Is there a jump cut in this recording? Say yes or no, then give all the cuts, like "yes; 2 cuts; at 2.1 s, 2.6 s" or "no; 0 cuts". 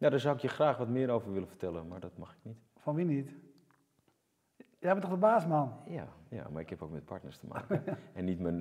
yes; 1 cut; at 2.7 s